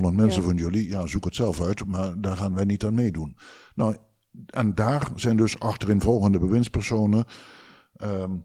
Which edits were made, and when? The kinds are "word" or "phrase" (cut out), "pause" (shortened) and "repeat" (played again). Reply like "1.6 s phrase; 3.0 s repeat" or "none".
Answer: none